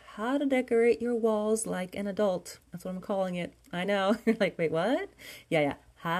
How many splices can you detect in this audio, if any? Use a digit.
0